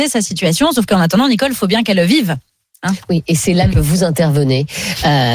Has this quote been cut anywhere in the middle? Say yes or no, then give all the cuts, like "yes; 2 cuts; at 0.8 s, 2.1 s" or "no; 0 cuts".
no; 0 cuts